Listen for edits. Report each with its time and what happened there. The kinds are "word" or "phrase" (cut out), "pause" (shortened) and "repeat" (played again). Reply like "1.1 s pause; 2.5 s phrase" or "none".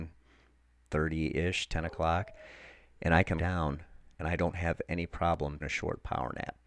3.4 s word; 4.1 s pause; 5.6 s word